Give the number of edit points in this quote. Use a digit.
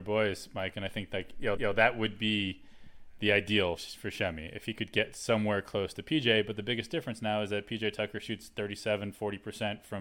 2